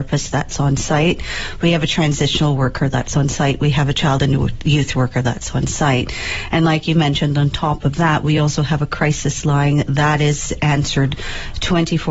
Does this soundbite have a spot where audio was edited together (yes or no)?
no